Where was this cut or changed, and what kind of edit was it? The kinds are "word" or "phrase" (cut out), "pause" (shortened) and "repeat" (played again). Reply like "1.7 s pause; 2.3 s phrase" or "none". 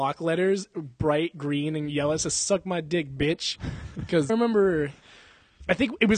4.3 s phrase